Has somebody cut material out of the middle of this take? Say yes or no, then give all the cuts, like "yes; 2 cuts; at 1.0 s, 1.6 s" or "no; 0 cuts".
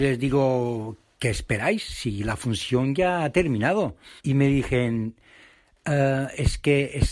yes; 1 cut; at 4.2 s